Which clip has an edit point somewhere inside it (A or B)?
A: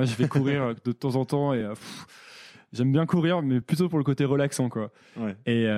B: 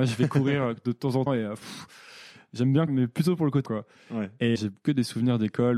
B